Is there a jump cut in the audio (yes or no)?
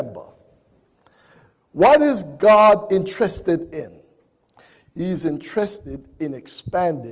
no